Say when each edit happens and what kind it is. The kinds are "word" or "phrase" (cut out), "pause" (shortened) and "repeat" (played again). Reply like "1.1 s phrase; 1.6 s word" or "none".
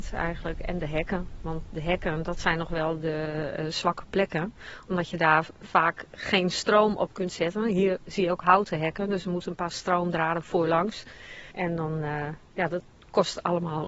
11.5 s pause

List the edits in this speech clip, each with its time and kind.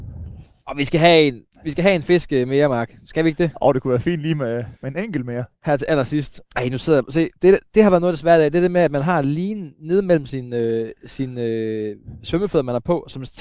1.5 s pause; 4.8 s pause; 6.5 s pause; 7.4 s pause

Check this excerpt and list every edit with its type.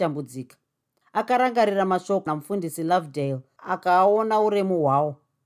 2.3 s phrase

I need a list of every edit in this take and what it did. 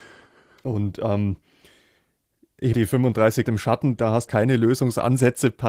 2.7 s phrase; 3.5 s word; 4.0 s word; 4.3 s phrase

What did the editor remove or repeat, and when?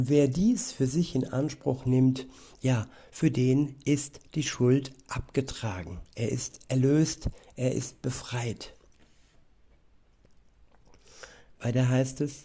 none

